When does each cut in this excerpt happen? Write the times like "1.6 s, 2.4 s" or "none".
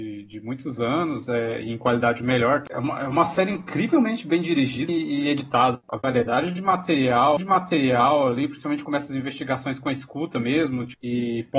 4.9 s, 7.4 s, 8.8 s